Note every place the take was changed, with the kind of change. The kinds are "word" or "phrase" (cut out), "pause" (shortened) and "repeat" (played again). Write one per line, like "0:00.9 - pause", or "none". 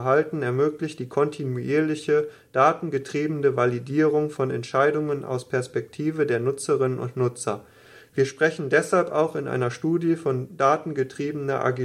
none